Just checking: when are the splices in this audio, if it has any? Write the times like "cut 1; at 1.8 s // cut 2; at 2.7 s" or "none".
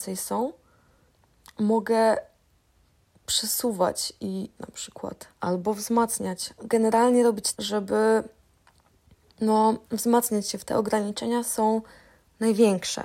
cut 1; at 4.6 s // cut 2; at 5.3 s // cut 3; at 6.6 s // cut 4; at 7.5 s // cut 5; at 9.8 s // cut 6; at 10.6 s